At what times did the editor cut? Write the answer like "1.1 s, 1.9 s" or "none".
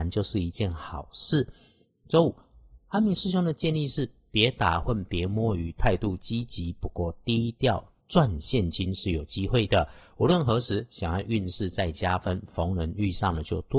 8.0 s